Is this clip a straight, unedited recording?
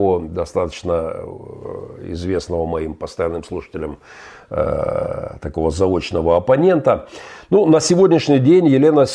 yes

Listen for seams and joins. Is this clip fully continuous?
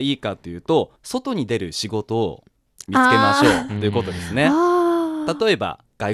no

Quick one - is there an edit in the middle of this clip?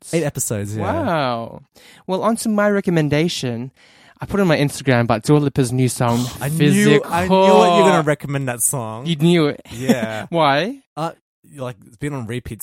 no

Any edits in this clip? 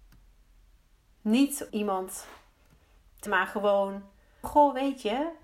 yes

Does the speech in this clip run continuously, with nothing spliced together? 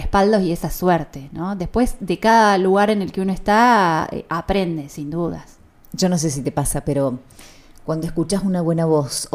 yes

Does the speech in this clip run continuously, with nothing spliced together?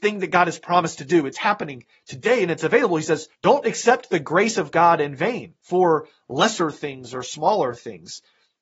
no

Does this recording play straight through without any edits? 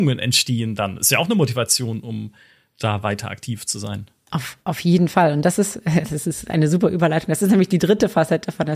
yes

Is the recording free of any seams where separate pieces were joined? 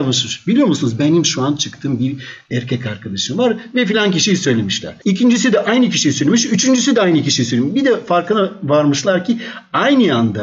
yes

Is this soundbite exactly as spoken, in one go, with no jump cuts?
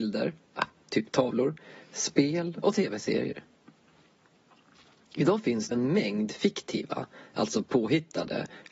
no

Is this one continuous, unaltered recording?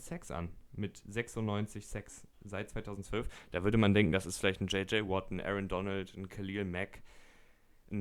no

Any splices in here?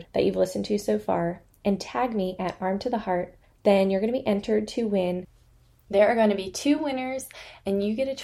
no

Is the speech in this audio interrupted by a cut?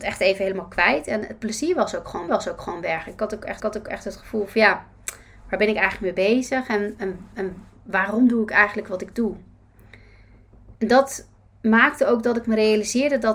yes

